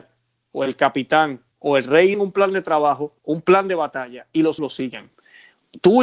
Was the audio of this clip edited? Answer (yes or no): yes